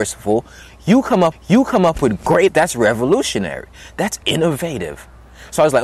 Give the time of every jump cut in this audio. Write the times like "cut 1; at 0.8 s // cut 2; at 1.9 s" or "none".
cut 1; at 1.3 s // cut 2; at 2.5 s // cut 3; at 4.2 s

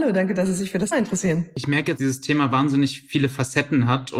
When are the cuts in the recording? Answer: cut 1; at 0.9 s // cut 2; at 2.0 s

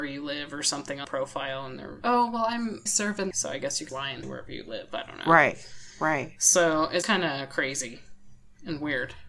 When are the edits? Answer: cut 1; at 1.0 s // cut 2; at 2.0 s // cut 3; at 2.9 s // cut 4; at 3.3 s // cut 5; at 3.9 s // cut 6; at 4.2 s // cut 7; at 7.0 s

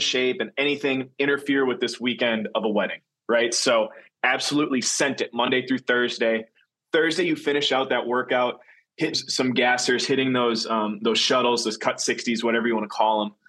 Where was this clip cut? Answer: cut 1; at 9.1 s

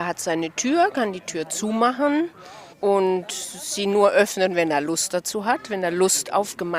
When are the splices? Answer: cut 1; at 2.7 s

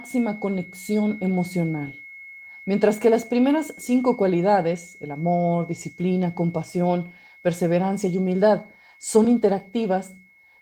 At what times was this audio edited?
none

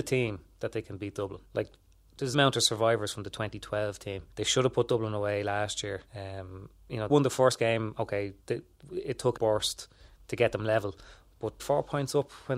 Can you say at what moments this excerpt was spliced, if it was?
cut 1; at 1.5 s // cut 2; at 2.3 s // cut 3; at 4.3 s // cut 4; at 6.1 s // cut 5; at 7.1 s // cut 6; at 8.4 s // cut 7; at 9.4 s // cut 8; at 11.6 s

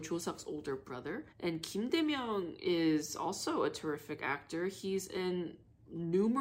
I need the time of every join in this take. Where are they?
cut 1; at 1.3 s

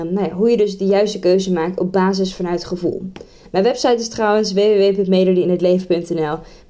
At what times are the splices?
none

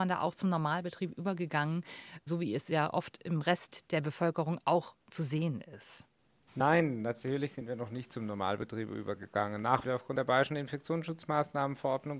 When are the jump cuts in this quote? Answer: cut 1; at 5.0 s // cut 2; at 9.8 s

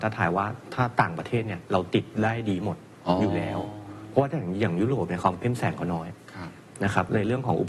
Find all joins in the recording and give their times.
cut 1; at 2.9 s

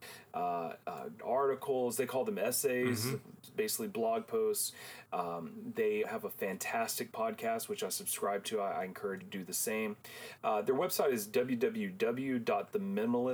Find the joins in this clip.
cut 1; at 1.2 s // cut 2; at 6.0 s // cut 3; at 9.2 s

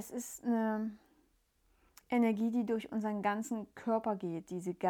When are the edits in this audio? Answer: none

